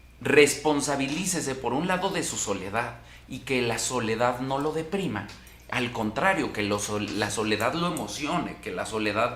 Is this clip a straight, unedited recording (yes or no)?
yes